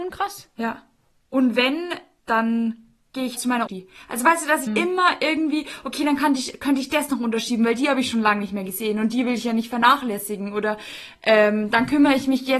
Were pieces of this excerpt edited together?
yes; 4 cuts; at 2.2 s, 3.4 s, 3.7 s, 4.7 s

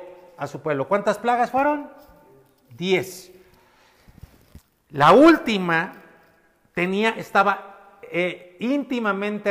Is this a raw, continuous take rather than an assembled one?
yes; 0 cuts

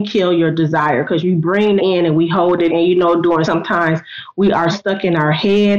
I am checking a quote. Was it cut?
yes; 4 cuts; at 1.8 s, 2.7 s, 3.4 s, 4.7 s

